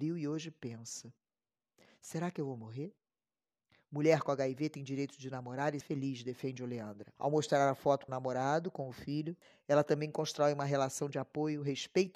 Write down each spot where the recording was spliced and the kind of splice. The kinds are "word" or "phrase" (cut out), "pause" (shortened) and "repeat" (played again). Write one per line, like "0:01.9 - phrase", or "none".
0:05.8 - word
0:07.2 - pause
0:08.1 - word
0:09.4 - pause